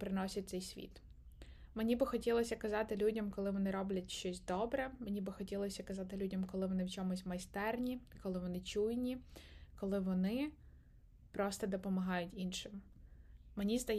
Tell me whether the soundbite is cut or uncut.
uncut